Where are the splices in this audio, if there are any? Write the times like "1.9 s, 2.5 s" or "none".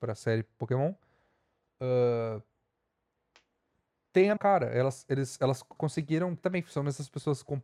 4.4 s, 5.8 s, 6.4 s

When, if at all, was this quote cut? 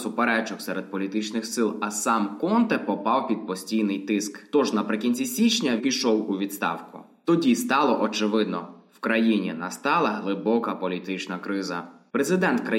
5.8 s

